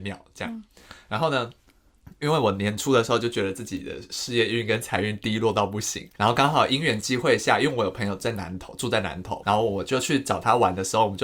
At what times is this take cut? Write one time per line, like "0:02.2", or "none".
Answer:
0:06.1
0:09.4